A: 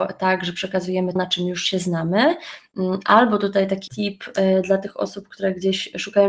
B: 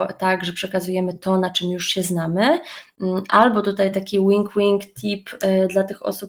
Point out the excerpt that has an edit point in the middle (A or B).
A